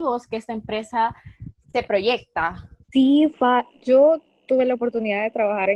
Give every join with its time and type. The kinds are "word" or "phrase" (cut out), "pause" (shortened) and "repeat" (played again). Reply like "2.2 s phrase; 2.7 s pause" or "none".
1.6 s word; 2.8 s pause